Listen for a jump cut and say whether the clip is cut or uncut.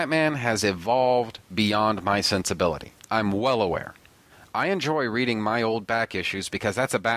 cut